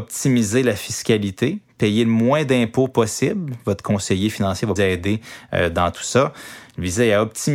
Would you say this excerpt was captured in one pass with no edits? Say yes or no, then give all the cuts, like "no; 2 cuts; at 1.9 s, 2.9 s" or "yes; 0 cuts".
no; 1 cut; at 4.8 s